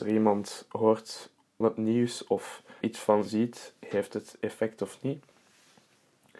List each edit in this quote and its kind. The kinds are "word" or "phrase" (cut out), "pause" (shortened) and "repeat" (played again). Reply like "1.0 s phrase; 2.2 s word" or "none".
1.6 s word; 2.8 s word

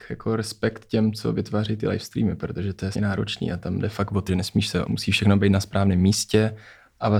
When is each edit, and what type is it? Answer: 2.9 s word; 4.3 s phrase; 4.9 s word

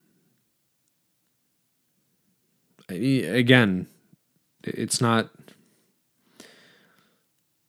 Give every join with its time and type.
none

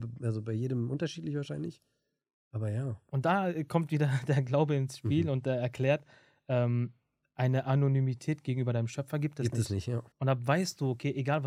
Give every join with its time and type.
10.1 s pause

